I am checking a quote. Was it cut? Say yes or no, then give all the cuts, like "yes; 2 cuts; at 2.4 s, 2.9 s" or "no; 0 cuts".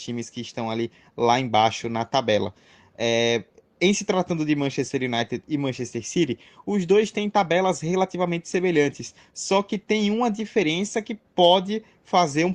no; 0 cuts